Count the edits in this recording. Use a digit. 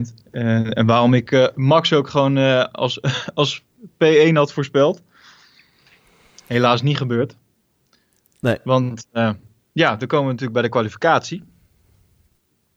0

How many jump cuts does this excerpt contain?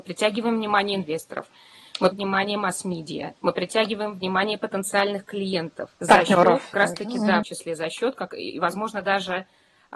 5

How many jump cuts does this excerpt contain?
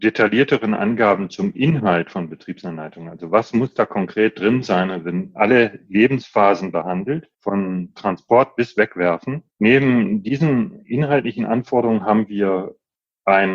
2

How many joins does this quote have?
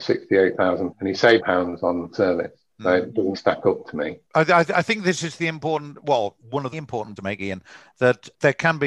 8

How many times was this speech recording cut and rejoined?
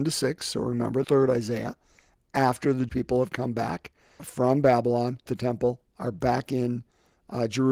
4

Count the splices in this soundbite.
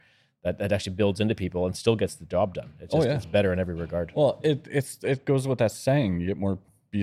0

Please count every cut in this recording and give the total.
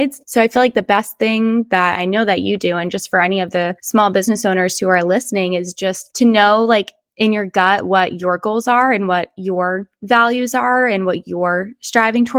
0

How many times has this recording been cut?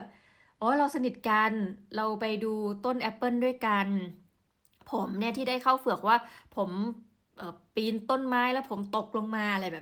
0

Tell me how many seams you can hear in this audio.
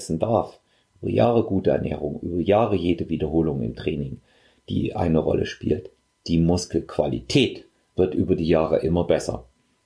0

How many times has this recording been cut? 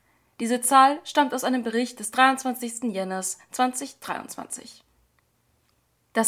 0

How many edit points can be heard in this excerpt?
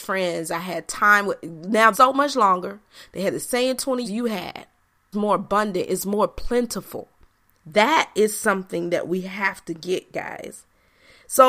3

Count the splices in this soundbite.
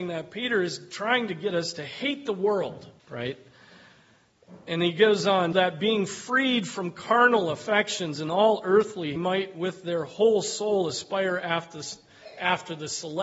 3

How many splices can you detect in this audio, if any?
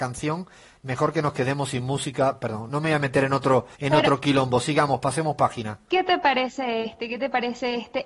2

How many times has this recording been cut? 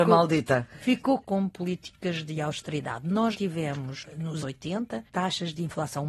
4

